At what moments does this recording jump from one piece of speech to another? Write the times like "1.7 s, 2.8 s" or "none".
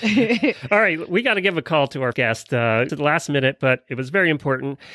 2.1 s, 2.9 s